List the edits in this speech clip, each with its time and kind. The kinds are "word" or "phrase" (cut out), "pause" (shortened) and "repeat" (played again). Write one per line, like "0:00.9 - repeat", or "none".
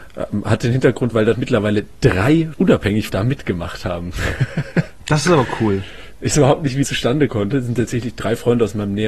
0:01.3 - word
0:02.5 - word
0:03.1 - word
0:06.3 - word
0:06.8 - word
0:07.3 - word